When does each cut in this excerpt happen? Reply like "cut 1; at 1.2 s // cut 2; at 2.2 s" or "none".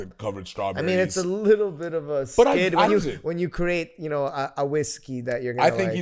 cut 1; at 2.9 s